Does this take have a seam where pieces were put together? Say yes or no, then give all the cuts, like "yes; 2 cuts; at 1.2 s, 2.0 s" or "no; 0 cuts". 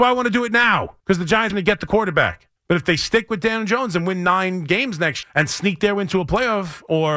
yes; 4 cuts; at 1.0 s, 1.5 s, 2.6 s, 5.2 s